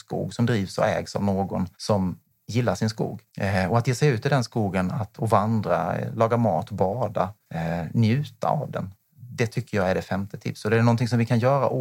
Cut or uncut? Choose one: cut